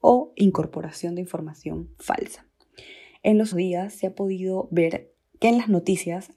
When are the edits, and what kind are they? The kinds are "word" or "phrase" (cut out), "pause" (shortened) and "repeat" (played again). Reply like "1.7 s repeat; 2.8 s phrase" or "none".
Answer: 1.9 s pause; 3.5 s word; 5.2 s pause